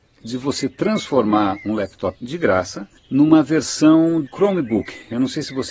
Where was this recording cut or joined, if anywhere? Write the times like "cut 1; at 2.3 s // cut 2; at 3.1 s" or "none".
cut 1; at 2.1 s // cut 2; at 3.0 s // cut 3; at 4.3 s